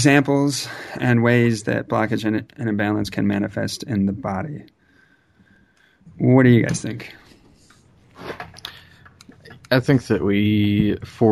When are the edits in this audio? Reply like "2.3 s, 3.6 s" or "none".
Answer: none